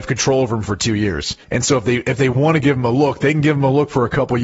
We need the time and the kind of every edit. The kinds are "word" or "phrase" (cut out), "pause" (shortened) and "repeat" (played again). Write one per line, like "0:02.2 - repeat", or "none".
0:01.4 - pause